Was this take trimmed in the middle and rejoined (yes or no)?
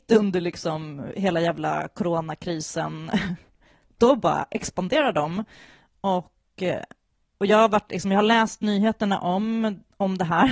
no